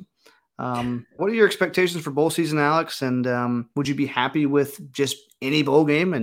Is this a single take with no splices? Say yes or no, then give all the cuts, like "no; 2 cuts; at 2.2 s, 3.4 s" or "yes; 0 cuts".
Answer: no; 2 cuts; at 1.2 s, 3.7 s